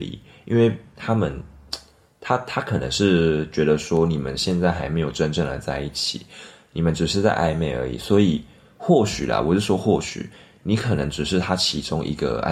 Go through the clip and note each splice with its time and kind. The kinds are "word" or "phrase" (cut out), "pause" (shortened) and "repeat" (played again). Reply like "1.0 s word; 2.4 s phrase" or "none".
none